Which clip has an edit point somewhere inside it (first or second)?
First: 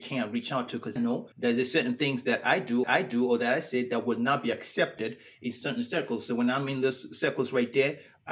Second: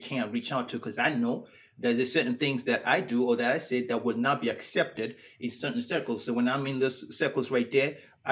first